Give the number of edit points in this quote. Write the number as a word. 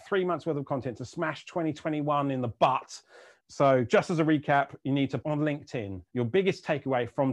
three